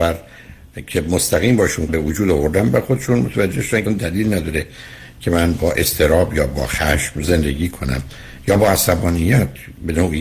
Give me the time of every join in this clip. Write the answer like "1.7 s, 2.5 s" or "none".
1.9 s, 3.9 s